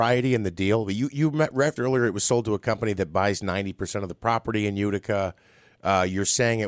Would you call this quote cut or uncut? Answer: cut